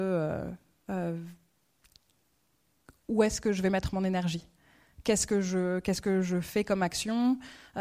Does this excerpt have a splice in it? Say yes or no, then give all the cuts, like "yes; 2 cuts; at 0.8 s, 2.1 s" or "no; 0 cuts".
no; 0 cuts